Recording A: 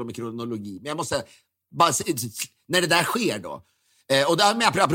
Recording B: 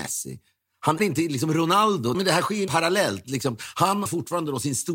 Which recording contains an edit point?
B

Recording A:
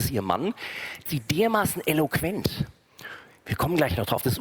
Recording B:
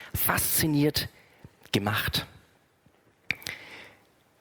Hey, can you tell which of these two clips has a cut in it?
A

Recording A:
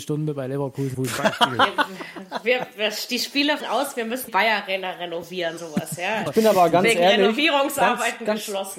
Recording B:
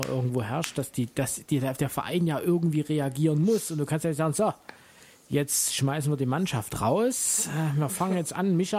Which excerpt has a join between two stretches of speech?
A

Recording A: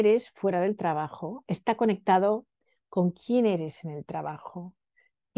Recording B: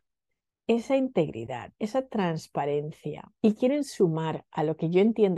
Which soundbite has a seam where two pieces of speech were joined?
B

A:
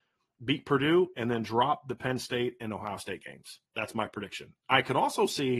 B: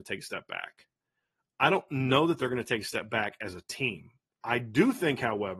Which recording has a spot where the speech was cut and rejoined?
A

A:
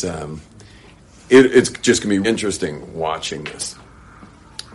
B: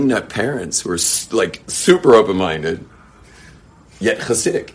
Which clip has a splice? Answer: A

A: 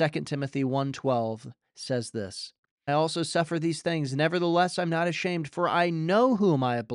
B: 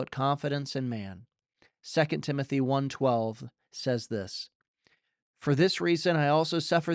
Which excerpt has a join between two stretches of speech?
A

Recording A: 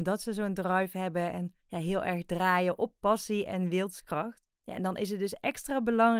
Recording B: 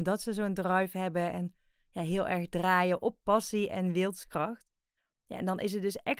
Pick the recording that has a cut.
A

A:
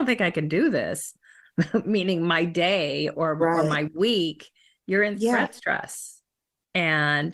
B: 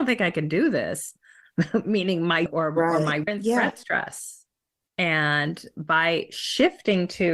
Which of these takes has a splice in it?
B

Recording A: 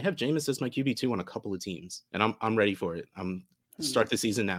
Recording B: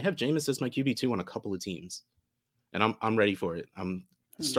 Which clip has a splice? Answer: A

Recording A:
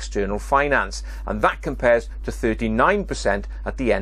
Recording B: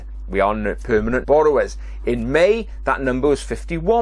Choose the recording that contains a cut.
B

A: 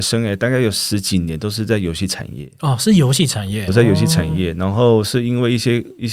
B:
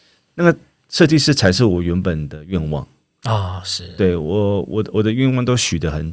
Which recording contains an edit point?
A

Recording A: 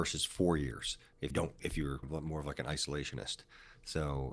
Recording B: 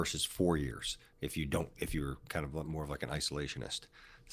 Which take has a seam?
A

